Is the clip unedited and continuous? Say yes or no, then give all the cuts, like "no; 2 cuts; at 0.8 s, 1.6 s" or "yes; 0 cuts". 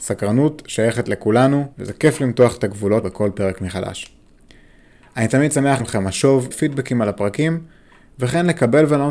no; 4 cuts; at 1.7 s, 3.0 s, 5.8 s, 6.5 s